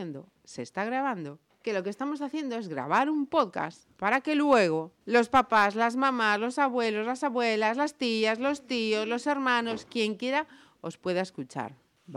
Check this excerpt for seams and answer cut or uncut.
uncut